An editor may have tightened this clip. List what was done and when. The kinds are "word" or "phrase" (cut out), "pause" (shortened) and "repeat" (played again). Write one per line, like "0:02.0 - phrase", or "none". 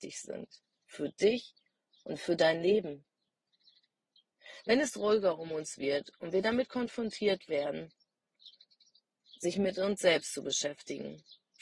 none